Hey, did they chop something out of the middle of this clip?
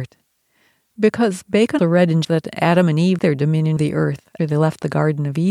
yes; 5 cuts; at 1.8 s, 2.2 s, 3.2 s, 3.8 s, 4.4 s

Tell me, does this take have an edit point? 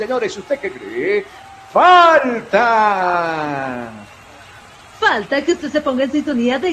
no; 0 cuts

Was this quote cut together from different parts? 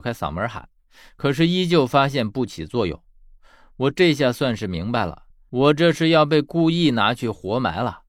no; 0 cuts

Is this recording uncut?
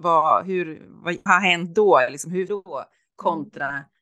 no; 2 cuts; at 1.3 s, 2.5 s

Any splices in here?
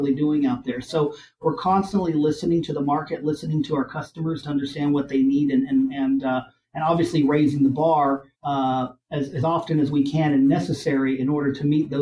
yes; 1 cut; at 8.3 s

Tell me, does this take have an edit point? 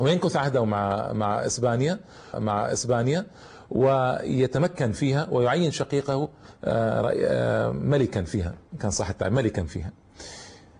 yes; 1 cut; at 2.3 s

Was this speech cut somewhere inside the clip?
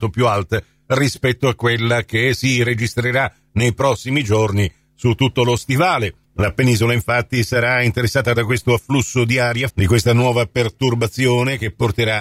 yes; 1 cut; at 9.7 s

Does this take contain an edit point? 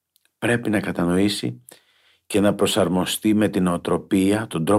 no; 0 cuts

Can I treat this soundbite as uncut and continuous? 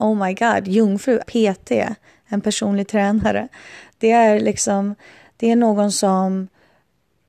no; 1 cut; at 1.2 s

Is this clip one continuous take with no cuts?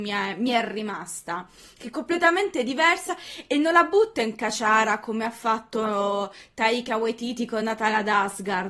yes; 0 cuts

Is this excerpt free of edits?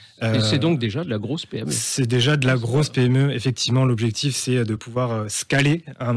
yes; 0 cuts

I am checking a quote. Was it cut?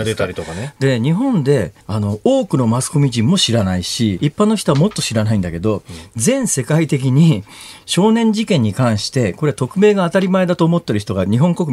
yes; 2 cuts; at 1.8 s, 4.2 s

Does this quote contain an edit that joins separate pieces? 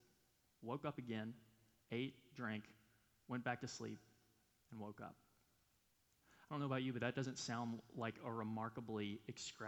no; 0 cuts

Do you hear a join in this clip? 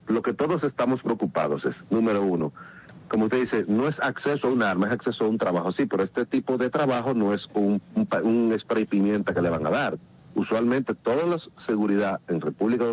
no; 0 cuts

